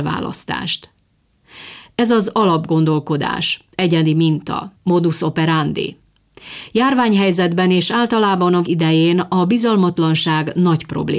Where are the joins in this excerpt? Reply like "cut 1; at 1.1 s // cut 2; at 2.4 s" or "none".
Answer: cut 1; at 4.8 s // cut 2; at 8.6 s